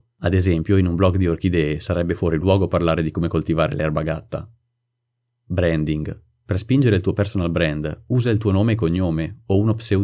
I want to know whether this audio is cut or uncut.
uncut